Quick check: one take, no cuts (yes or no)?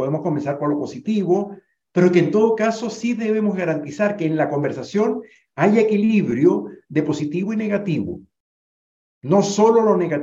yes